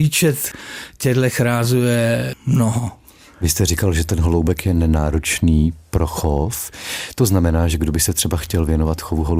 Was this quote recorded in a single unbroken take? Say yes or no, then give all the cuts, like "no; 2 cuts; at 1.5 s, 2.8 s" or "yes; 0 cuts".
yes; 0 cuts